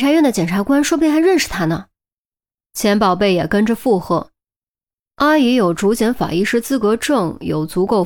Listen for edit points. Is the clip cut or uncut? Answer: uncut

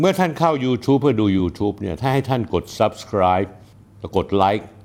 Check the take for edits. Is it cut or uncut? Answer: uncut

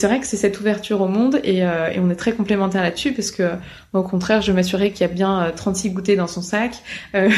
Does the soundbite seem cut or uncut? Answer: uncut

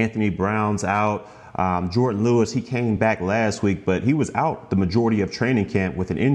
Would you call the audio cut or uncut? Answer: uncut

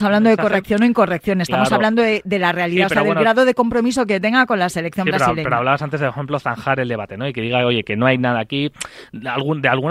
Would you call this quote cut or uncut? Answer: uncut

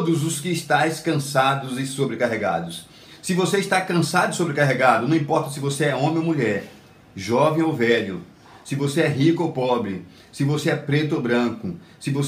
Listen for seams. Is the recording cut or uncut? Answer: uncut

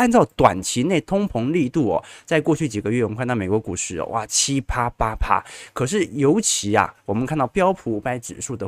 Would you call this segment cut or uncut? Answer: uncut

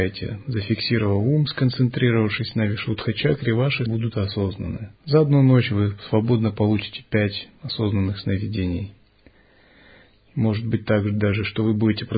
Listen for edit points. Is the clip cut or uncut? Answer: cut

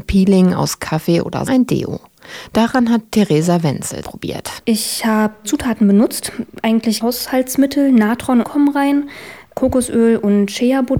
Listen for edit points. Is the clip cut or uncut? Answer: cut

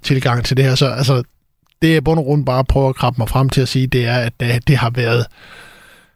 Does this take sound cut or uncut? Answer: uncut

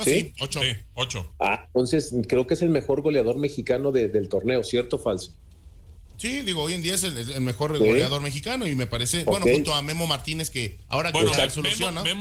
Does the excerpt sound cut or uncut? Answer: cut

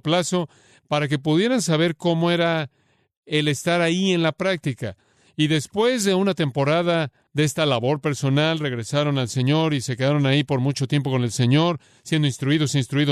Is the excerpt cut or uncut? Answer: uncut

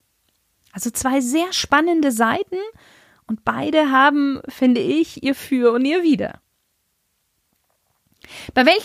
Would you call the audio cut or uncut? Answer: uncut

